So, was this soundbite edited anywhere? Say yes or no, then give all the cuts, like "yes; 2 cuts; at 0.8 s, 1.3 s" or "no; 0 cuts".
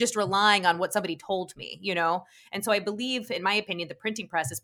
no; 0 cuts